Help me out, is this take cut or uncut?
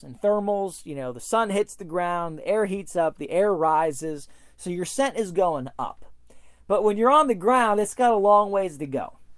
uncut